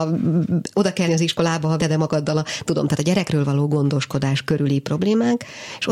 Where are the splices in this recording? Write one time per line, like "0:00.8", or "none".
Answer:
0:01.0
0:01.8
0:02.7